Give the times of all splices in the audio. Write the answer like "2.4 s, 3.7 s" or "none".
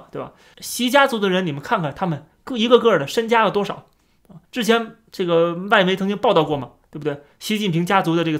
4.4 s